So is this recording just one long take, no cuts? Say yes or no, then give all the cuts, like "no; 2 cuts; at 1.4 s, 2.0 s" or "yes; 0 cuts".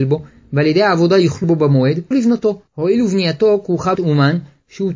no; 4 cuts; at 1.4 s, 2.1 s, 2.7 s, 3.9 s